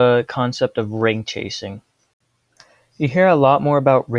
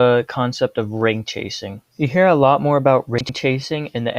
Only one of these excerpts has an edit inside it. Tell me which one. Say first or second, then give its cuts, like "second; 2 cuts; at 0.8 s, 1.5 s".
second; 1 cut; at 1.9 s